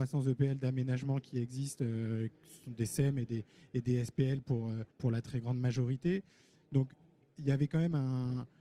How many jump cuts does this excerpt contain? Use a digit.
1